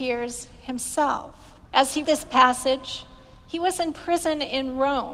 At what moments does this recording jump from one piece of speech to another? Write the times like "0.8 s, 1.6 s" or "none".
1.7 s, 2.0 s